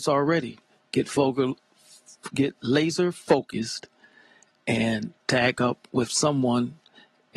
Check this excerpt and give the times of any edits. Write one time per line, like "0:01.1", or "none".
0:05.2